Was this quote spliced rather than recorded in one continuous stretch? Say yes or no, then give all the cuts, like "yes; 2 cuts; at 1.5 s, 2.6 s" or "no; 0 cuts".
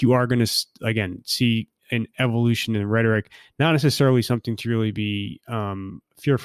no; 0 cuts